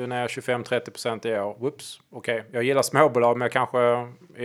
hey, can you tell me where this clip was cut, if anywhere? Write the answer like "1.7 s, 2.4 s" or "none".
none

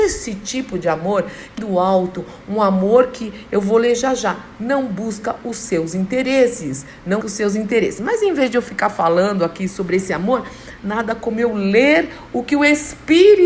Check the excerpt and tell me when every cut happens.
1.6 s, 7.2 s

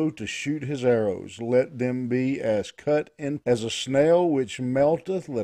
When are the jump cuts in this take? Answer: 3.4 s

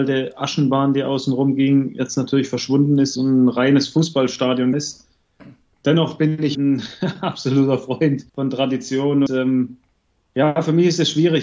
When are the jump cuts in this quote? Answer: 3.1 s, 4.7 s, 6.5 s, 8.3 s, 9.3 s

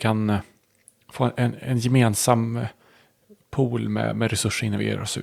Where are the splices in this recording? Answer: none

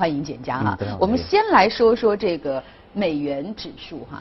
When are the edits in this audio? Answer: none

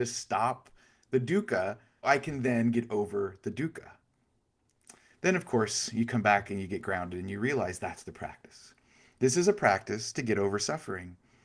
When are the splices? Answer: 2.0 s

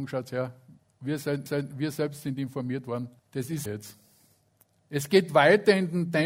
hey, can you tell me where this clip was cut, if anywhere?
1.5 s, 3.2 s, 3.7 s

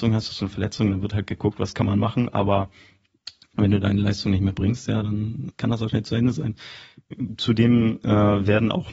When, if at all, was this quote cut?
5.5 s, 5.9 s

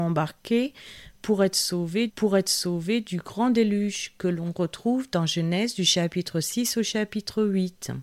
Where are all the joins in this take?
2.1 s

